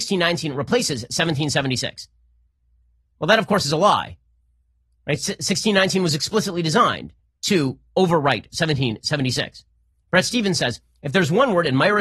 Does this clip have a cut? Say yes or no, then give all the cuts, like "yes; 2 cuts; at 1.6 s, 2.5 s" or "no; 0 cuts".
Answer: no; 0 cuts